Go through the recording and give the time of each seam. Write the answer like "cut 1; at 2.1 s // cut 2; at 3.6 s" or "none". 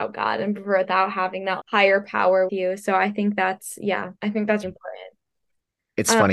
cut 1; at 1.6 s // cut 2; at 2.5 s // cut 3; at 4.2 s // cut 4; at 4.6 s